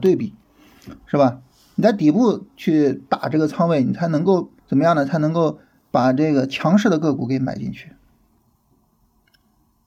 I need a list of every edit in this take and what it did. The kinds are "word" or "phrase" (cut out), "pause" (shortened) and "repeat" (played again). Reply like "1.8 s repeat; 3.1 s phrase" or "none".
4.6 s pause